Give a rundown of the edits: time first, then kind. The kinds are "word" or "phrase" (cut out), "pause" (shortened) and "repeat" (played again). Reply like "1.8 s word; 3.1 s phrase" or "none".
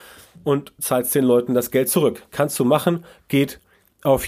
none